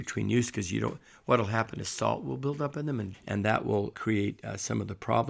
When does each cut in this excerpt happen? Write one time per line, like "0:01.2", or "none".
0:03.1
0:03.9